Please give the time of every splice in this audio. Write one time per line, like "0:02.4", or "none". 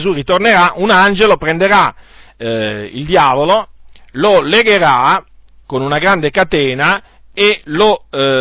none